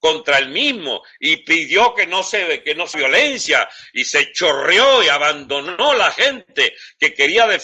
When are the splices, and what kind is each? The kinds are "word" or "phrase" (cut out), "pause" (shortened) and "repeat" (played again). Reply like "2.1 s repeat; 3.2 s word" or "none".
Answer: 2.9 s word

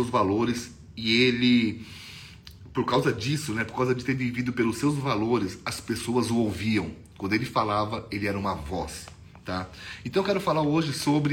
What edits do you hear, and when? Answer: none

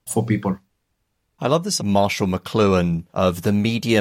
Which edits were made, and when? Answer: 1.8 s phrase; 3.1 s pause

